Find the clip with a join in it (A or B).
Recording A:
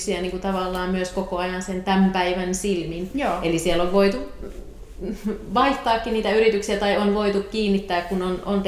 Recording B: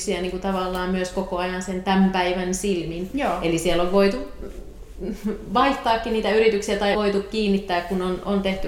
B